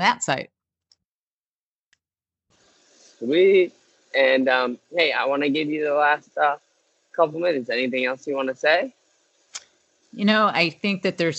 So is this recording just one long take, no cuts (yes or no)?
yes